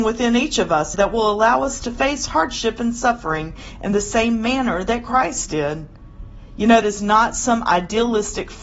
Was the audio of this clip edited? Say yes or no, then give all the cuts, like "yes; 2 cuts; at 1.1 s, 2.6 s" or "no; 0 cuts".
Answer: yes; 2 cuts; at 0.9 s, 6.8 s